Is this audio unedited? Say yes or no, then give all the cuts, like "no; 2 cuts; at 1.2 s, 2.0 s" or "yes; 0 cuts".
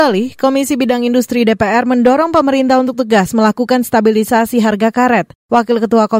yes; 0 cuts